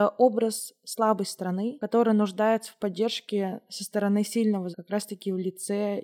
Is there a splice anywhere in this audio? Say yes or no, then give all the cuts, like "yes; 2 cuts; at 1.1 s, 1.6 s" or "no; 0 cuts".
yes; 1 cut; at 4.7 s